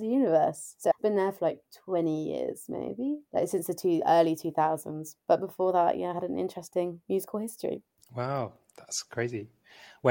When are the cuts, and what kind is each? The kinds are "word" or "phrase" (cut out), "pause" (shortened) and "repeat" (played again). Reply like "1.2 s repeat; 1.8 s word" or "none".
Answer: 1.0 s phrase; 3.3 s pause